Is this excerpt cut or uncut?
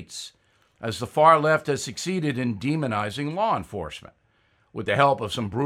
uncut